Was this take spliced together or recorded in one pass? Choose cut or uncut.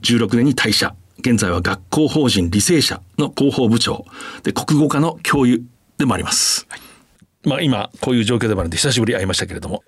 uncut